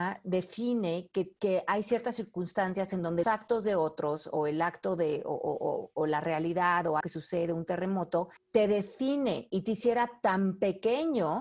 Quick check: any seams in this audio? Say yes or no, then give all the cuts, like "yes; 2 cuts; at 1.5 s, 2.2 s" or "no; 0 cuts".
yes; 4 cuts; at 1.4 s, 3.2 s, 7.0 s, 8.4 s